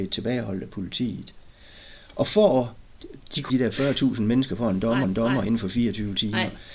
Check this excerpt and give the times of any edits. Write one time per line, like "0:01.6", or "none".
0:03.5
0:05.0